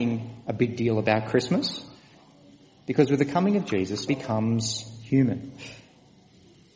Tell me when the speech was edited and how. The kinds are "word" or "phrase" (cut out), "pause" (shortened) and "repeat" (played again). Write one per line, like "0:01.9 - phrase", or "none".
0:04.1 - word